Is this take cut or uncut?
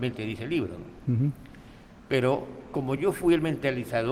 uncut